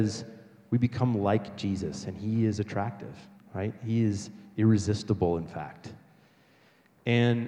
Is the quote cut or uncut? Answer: cut